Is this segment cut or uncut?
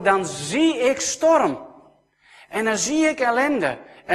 uncut